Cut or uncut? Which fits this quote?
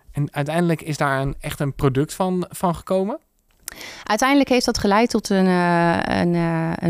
uncut